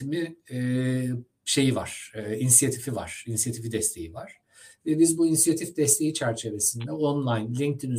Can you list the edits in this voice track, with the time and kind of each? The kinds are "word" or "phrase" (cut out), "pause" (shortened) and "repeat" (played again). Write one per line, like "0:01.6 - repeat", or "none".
none